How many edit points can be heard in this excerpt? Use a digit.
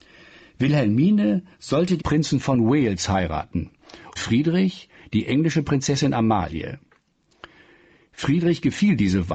2